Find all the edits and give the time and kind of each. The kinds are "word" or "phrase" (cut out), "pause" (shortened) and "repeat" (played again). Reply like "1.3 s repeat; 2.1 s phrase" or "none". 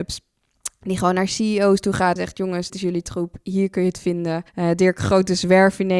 2.2 s word; 2.7 s word; 4.5 s pause